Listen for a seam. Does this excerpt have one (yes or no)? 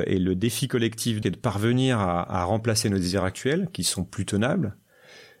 yes